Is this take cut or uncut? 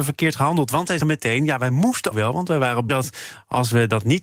cut